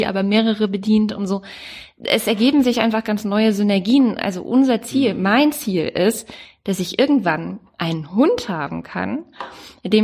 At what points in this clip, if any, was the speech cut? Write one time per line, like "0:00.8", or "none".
none